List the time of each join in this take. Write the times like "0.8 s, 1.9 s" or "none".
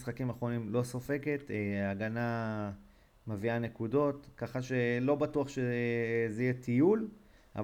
none